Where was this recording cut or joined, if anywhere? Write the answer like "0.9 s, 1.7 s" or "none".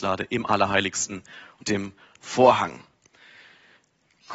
1.6 s